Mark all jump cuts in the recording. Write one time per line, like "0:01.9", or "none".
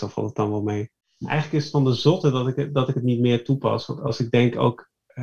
none